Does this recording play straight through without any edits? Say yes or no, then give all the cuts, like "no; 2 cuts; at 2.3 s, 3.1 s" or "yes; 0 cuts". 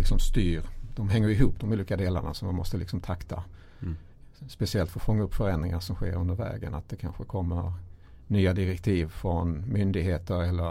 yes; 0 cuts